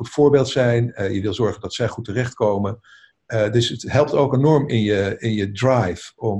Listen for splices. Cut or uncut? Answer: uncut